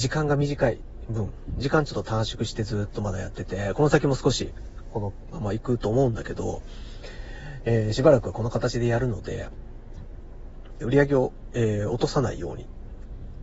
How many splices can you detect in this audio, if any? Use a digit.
1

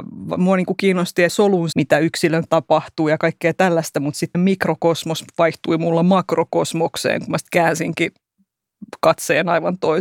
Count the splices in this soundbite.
4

